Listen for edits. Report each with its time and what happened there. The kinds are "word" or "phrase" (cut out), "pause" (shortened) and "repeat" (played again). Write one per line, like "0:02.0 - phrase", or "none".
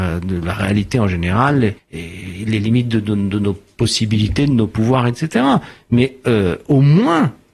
0:01.8 - pause